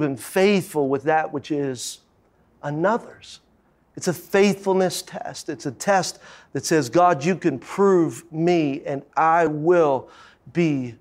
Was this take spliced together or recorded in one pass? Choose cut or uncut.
uncut